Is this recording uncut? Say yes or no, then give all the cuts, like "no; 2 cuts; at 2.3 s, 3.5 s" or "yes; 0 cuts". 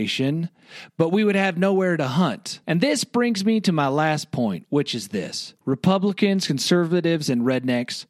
no; 2 cuts; at 2.6 s, 5.6 s